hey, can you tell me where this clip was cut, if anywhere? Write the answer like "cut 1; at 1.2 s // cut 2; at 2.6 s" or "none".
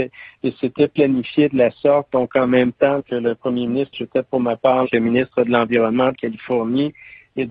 cut 1; at 3.0 s // cut 2; at 3.9 s // cut 3; at 4.8 s // cut 4; at 6.1 s